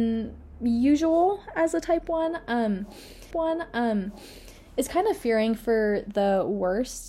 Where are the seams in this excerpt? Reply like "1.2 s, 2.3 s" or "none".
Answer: 3.3 s

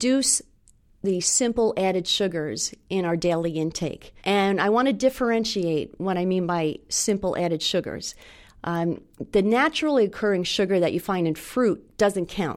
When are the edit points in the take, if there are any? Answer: 4.2 s

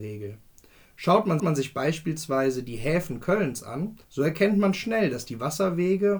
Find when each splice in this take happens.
1.4 s, 4.0 s

